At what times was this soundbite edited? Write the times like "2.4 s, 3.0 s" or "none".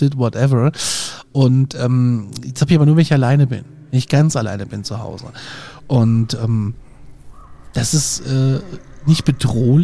none